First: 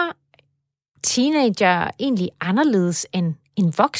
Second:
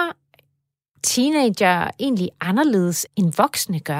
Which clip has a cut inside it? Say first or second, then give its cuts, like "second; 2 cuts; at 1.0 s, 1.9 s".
second; 1 cut; at 3.1 s